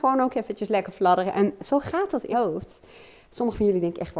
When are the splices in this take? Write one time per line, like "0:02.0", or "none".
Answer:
0:01.6
0:02.3